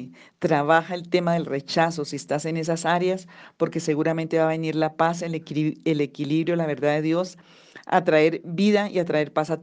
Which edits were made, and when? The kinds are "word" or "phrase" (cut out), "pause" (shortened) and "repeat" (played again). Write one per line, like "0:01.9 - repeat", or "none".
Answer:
none